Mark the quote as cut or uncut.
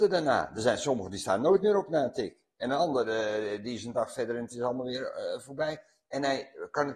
uncut